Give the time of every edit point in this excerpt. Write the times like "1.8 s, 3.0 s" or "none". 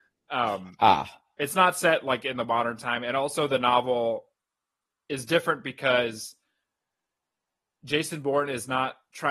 none